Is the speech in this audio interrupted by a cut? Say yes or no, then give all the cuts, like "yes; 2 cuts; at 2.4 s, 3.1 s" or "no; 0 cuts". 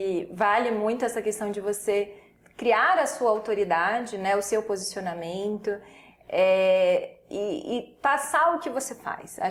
no; 0 cuts